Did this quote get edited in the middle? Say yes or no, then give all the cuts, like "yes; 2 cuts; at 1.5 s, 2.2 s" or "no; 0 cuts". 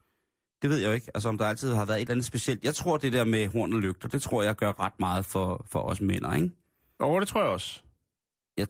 no; 0 cuts